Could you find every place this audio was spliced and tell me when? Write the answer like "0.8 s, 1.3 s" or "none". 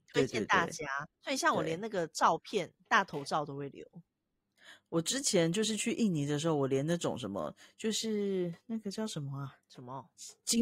1.1 s, 9.6 s